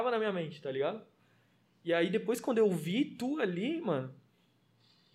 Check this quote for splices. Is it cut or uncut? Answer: uncut